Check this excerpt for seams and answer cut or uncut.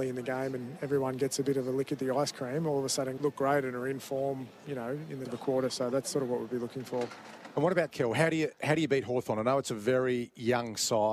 cut